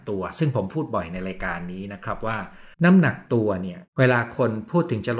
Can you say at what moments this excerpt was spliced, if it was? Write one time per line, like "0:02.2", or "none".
0:02.7
0:03.9